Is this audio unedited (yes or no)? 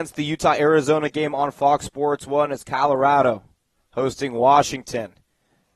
yes